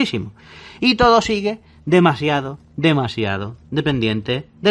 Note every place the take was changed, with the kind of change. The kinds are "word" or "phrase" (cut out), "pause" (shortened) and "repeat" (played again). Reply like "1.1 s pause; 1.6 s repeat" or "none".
none